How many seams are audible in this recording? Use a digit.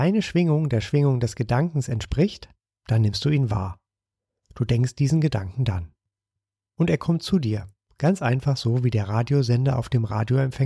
0